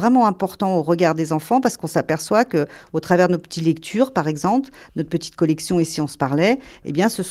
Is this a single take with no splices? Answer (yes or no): yes